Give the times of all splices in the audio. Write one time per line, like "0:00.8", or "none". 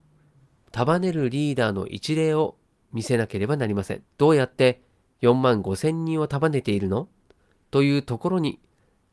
0:04.1